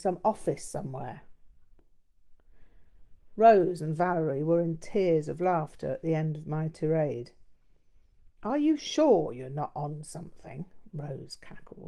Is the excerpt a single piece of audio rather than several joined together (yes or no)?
yes